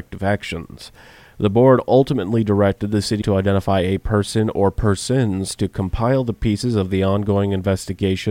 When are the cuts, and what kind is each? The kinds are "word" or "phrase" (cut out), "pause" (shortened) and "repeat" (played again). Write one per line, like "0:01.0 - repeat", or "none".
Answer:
0:03.2 - word